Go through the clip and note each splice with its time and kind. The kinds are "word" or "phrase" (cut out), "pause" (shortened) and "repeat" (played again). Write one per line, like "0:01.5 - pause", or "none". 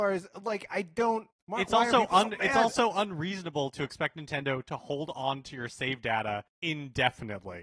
0:01.4 - pause
0:06.5 - pause